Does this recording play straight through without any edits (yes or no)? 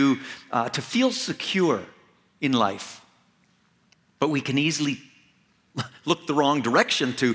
yes